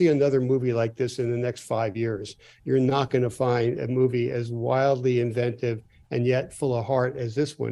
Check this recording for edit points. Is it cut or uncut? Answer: uncut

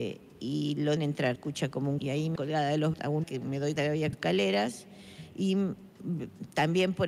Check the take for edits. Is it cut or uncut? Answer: cut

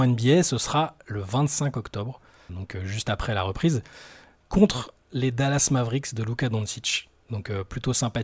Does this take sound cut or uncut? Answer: cut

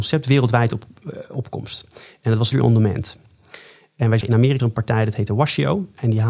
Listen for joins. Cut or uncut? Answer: cut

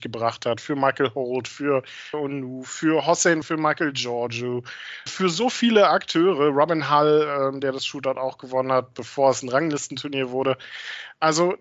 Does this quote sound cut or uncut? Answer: cut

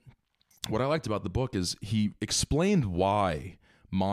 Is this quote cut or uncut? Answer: uncut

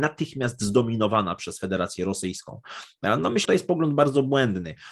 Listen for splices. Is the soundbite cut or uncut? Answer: cut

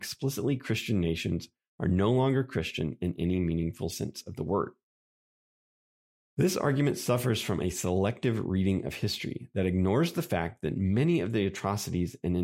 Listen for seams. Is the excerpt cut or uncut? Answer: uncut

